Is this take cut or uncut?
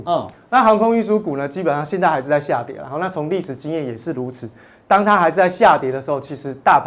uncut